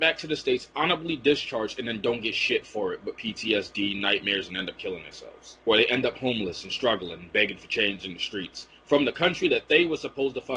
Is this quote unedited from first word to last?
no; 1 cut; at 5.6 s

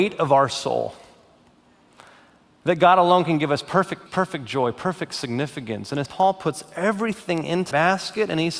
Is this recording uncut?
no; 3 cuts; at 4.1 s, 6.1 s, 7.7 s

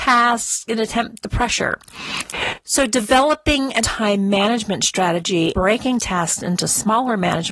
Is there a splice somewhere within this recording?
yes; 3 cuts; at 1.2 s, 3.8 s, 5.5 s

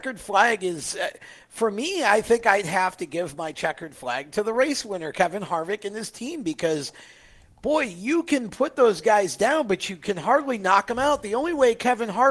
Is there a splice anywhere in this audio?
no; 0 cuts

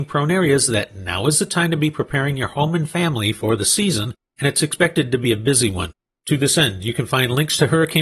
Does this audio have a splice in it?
no; 0 cuts

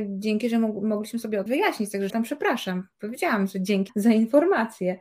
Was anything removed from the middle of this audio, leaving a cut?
yes; 3 cuts; at 1.5 s, 2.1 s, 3.9 s

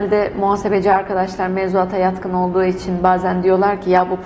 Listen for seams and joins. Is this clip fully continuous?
yes; 0 cuts

